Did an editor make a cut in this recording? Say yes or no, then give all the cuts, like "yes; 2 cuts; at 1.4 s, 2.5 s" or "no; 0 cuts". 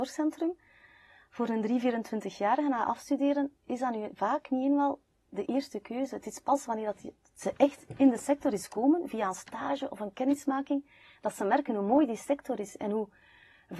no; 0 cuts